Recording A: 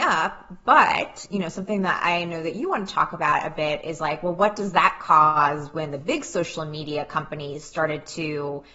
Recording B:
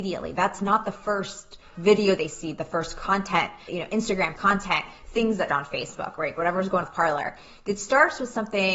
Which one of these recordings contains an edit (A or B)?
B